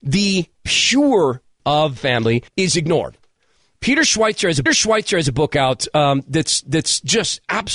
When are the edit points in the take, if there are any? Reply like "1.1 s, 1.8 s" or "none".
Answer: 1.6 s, 2.0 s, 2.5 s, 4.7 s, 6.6 s